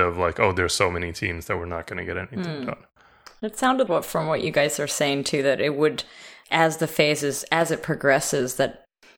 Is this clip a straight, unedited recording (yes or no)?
no